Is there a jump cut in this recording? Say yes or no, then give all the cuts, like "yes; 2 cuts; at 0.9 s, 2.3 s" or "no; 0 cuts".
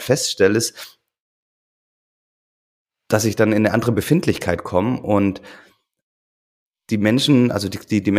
no; 0 cuts